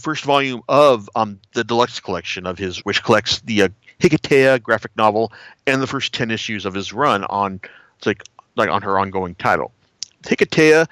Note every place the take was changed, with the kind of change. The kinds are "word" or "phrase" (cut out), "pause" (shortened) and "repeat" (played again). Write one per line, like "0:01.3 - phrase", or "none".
0:02.8 - phrase